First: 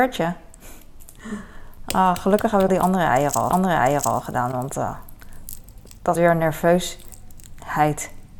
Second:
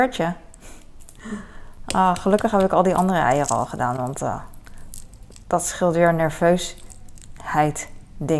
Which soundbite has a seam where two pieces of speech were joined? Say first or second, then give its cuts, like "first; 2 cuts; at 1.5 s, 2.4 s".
first; 3 cuts; at 2.7 s, 3.5 s, 6.2 s